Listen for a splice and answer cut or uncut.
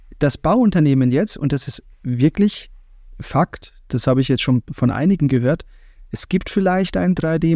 uncut